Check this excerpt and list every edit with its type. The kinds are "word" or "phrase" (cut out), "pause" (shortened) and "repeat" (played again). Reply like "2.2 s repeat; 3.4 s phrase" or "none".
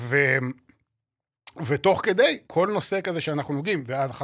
2.4 s pause